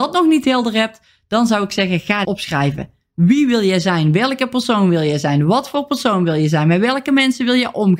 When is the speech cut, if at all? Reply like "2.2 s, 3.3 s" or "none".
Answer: 2.2 s